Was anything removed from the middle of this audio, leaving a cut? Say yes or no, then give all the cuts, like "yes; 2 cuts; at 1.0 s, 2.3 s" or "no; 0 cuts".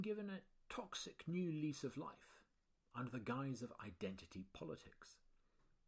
no; 0 cuts